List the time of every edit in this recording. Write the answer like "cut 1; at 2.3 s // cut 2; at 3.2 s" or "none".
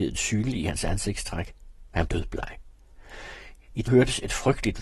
cut 1; at 2.1 s // cut 2; at 3.9 s